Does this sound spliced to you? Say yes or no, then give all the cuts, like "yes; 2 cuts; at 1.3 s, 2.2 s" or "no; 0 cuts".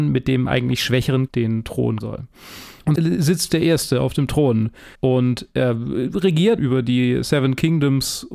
yes; 6 cuts; at 1.3 s, 2.0 s, 3.0 s, 3.5 s, 4.9 s, 6.6 s